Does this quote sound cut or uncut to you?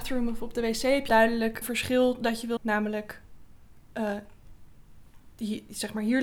cut